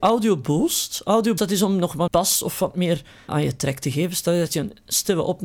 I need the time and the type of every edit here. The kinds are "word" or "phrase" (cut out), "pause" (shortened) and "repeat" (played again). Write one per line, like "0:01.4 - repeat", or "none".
0:01.4 - word
0:02.1 - word
0:03.3 - word